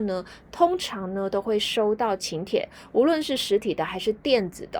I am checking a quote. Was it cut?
no; 0 cuts

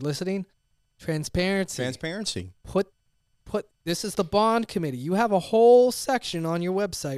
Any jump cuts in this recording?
no; 0 cuts

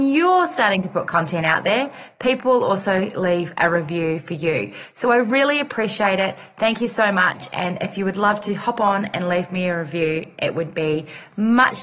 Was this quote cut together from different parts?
no; 0 cuts

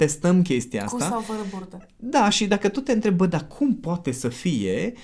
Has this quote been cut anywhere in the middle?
no; 0 cuts

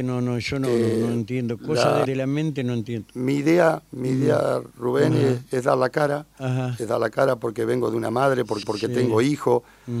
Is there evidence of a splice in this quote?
yes; 2 cuts; at 2.0 s, 8.6 s

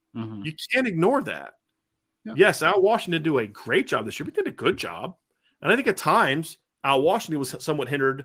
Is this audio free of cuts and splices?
yes; 0 cuts

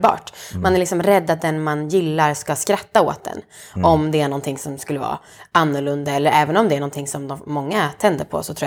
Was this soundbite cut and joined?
no; 0 cuts

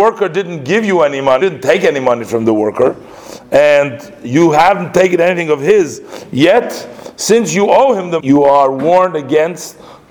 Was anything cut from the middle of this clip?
yes; 2 cuts; at 1.4 s, 8.2 s

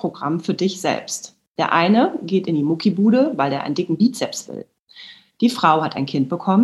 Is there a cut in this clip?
no; 0 cuts

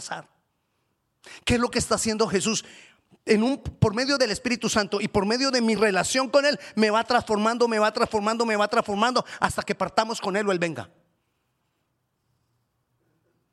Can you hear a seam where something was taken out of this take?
no; 0 cuts

